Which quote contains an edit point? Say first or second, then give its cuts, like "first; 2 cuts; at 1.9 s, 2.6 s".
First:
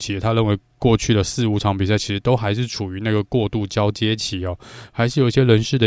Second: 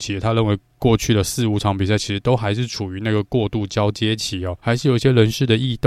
second; 1 cut; at 4.6 s